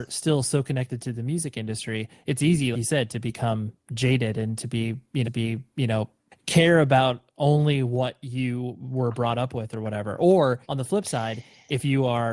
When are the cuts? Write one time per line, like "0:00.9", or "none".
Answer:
0:02.7
0:05.2
0:10.6